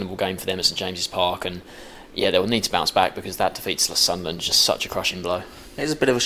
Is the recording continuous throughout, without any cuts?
yes; 0 cuts

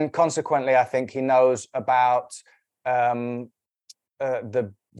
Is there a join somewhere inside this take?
no; 0 cuts

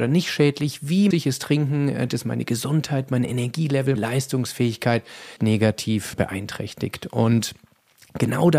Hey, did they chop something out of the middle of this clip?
yes; 5 cuts; at 1.1 s, 2.1 s, 4.0 s, 5.4 s, 6.1 s

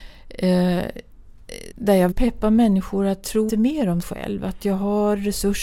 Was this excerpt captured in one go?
no; 4 cuts; at 1.7 s, 2.1 s, 3.5 s, 4.0 s

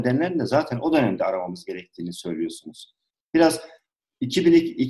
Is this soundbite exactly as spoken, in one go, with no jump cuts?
yes; 0 cuts

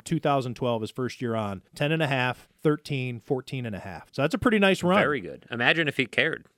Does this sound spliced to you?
yes; 2 cuts; at 1.7 s, 4.1 s

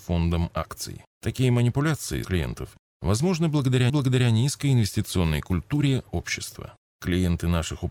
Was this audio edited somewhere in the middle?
yes; 4 cuts; at 1.1 s, 2.2 s, 3.9 s, 6.1 s

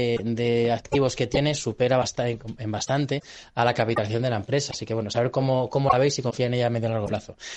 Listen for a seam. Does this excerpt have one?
no; 0 cuts

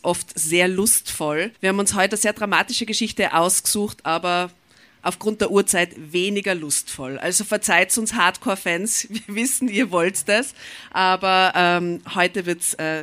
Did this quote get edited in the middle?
yes; 1 cut; at 1.6 s

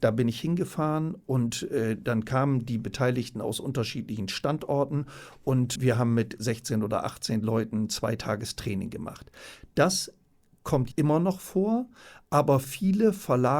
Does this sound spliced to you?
yes; 2 cuts; at 5.8 s, 10.9 s

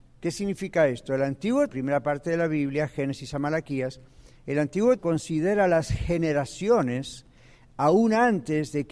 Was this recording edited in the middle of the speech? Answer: yes; 2 cuts; at 1.7 s, 5.0 s

